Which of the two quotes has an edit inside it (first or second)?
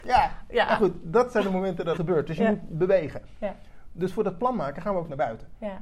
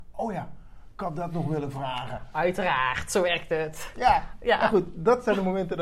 first